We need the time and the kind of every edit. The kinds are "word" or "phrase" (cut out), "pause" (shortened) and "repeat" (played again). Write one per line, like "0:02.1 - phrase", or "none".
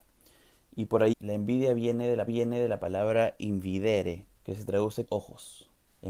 0:01.1 - phrase
0:02.3 - repeat
0:04.3 - pause
0:05.1 - phrase